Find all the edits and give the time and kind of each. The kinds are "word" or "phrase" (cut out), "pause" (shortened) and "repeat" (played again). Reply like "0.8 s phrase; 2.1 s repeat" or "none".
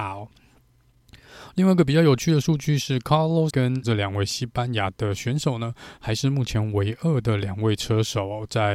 3.5 s word; 3.8 s word

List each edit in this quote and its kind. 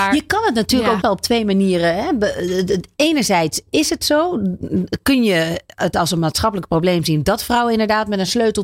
1.0 s word

